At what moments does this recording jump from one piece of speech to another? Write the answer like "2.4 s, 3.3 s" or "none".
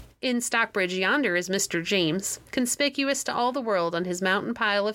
none